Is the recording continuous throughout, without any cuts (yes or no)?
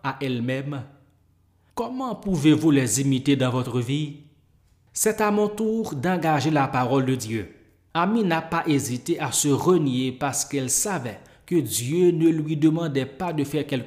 yes